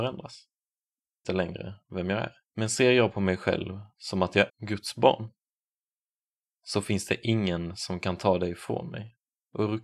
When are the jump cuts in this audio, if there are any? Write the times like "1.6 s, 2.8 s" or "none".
1.2 s, 2.4 s, 4.5 s